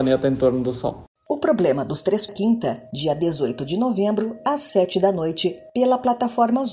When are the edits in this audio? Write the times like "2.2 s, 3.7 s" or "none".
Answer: 2.3 s